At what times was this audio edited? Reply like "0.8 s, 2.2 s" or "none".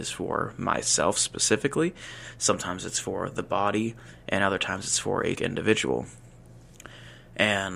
5.3 s